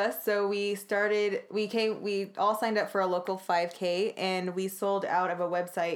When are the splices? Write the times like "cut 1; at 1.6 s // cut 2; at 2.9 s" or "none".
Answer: none